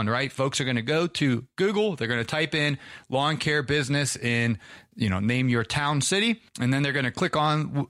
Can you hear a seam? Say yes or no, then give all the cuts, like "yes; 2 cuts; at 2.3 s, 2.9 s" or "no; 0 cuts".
yes; 1 cut; at 6.5 s